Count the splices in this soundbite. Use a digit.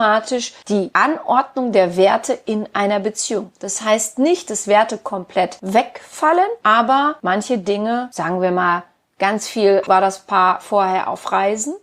0